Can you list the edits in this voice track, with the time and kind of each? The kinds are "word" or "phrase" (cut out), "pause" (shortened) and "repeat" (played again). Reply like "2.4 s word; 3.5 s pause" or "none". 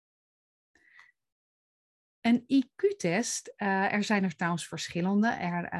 none